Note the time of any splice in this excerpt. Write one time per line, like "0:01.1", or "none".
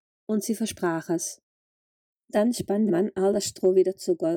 0:02.9